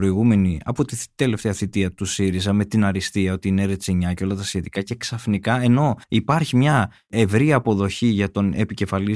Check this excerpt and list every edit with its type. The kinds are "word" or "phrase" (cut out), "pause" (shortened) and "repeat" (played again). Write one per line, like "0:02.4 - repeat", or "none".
0:06.0 - pause